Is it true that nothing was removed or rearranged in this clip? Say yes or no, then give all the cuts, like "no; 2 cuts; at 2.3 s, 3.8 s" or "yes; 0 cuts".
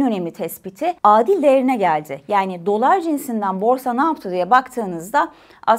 no; 1 cut; at 1.0 s